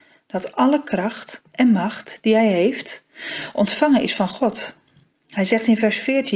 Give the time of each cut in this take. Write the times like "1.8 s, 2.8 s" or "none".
none